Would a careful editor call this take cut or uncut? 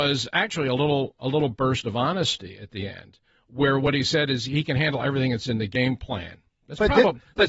uncut